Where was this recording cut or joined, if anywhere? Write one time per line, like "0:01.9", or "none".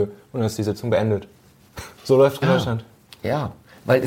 0:02.0
0:02.4